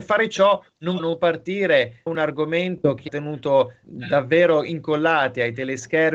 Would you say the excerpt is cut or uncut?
cut